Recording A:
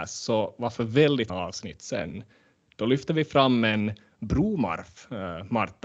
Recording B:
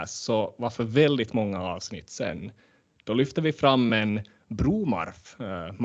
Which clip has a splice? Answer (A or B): A